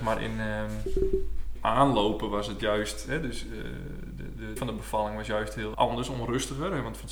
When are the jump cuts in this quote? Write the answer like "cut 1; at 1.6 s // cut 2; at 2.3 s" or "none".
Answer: cut 1; at 1.6 s // cut 2; at 4.6 s // cut 3; at 5.7 s